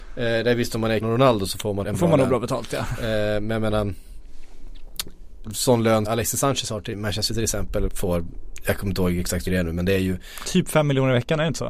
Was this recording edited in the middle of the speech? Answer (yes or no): yes